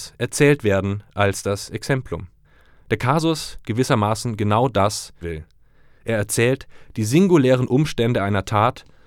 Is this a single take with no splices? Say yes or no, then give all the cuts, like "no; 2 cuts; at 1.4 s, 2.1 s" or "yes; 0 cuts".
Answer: no; 2 cuts; at 3.6 s, 5.2 s